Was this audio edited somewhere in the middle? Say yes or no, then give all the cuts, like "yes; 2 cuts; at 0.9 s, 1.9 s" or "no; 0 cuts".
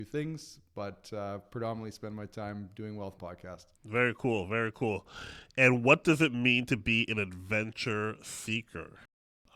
yes; 2 cuts; at 3.2 s, 3.7 s